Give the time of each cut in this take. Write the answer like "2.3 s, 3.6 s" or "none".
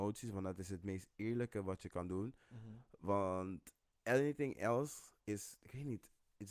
3.8 s, 5.2 s